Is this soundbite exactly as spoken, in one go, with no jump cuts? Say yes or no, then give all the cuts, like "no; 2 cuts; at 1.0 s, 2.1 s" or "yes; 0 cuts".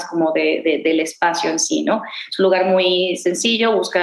yes; 0 cuts